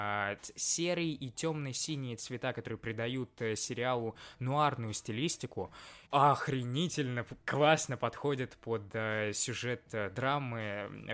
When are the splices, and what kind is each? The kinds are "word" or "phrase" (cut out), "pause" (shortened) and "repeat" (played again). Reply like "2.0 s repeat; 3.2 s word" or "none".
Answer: 6.1 s pause